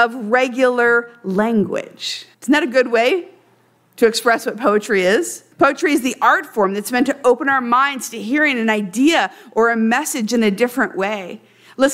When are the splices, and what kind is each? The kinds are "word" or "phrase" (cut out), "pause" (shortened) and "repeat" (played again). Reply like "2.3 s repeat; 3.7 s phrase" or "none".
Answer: 2.3 s pause; 5.5 s pause